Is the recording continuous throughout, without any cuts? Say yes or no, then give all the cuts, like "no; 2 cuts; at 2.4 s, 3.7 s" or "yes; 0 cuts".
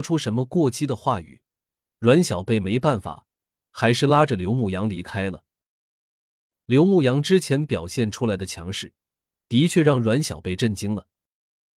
yes; 0 cuts